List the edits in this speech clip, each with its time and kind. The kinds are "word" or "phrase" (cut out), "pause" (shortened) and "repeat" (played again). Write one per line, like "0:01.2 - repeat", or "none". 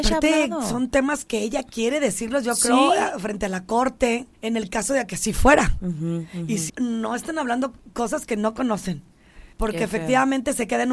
0:04.4 - pause
0:06.7 - word
0:09.5 - pause